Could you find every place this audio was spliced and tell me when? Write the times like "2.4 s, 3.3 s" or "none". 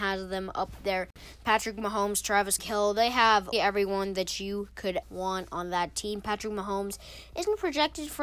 2.6 s, 3.5 s, 5.0 s